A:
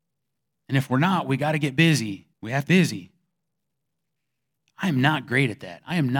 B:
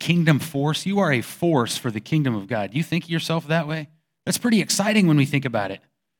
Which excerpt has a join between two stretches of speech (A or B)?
A